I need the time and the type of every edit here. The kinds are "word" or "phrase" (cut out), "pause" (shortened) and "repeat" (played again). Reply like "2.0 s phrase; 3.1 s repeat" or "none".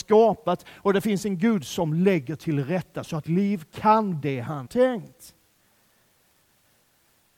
3.2 s word; 4.2 s word; 4.7 s word